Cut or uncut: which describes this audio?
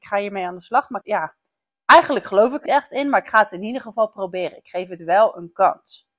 cut